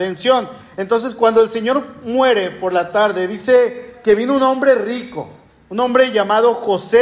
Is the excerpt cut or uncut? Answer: uncut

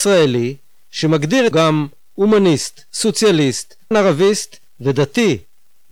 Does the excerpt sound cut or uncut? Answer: cut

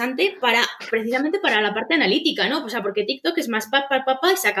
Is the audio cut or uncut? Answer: uncut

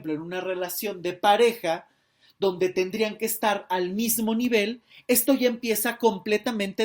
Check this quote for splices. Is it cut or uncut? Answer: uncut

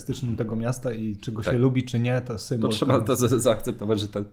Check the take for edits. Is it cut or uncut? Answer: uncut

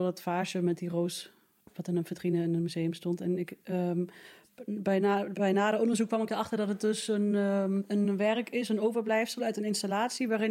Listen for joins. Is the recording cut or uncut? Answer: uncut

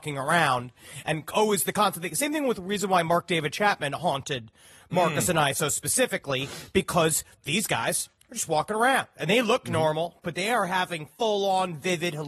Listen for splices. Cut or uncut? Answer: uncut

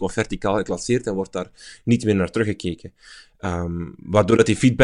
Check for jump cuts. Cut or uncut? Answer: uncut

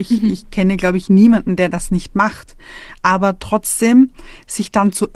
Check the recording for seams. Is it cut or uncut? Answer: uncut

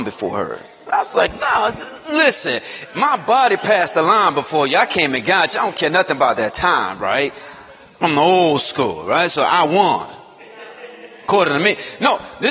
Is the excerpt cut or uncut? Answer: uncut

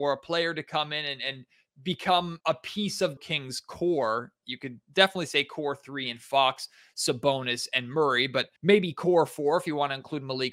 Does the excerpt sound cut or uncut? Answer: cut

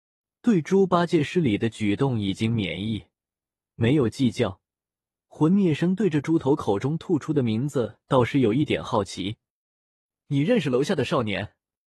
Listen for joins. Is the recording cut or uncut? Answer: uncut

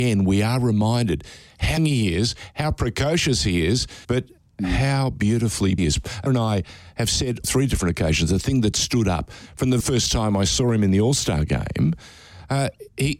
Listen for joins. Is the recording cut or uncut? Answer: cut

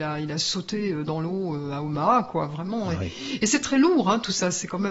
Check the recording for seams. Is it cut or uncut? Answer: uncut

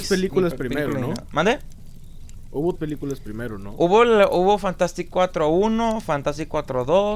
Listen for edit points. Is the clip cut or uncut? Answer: cut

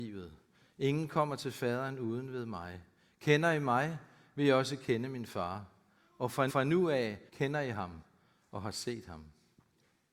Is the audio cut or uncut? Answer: cut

